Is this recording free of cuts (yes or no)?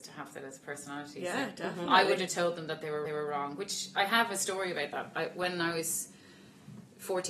no